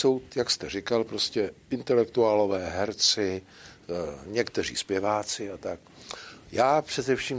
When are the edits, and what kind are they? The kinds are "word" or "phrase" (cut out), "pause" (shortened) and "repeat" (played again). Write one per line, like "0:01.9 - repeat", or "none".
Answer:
none